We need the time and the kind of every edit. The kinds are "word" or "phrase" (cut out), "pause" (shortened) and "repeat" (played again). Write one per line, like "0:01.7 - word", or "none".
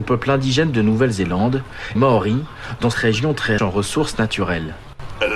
0:02.0 - word
0:02.9 - word
0:03.6 - word